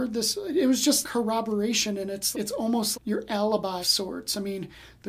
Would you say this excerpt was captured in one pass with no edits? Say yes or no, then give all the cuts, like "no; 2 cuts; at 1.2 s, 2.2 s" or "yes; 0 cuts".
no; 4 cuts; at 1.0 s, 2.3 s, 2.9 s, 3.8 s